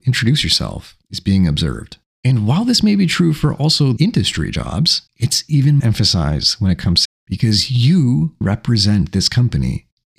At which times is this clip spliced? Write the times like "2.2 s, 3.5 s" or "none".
4.0 s, 5.1 s, 5.8 s, 7.0 s, 8.4 s